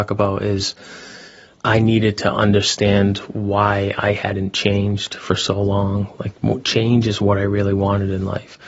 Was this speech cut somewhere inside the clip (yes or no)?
no